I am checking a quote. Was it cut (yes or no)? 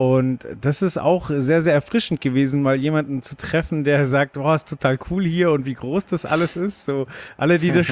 no